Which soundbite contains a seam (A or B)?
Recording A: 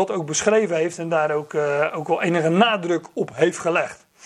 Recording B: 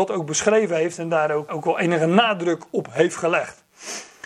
B